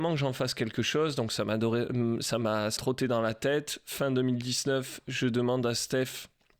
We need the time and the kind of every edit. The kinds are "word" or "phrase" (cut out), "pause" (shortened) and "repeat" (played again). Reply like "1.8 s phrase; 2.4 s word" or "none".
2.8 s word